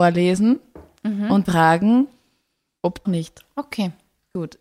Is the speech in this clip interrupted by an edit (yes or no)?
yes